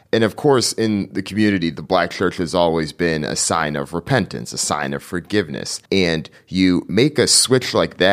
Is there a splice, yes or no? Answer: yes